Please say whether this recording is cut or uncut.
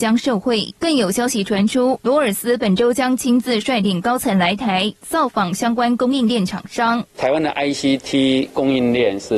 uncut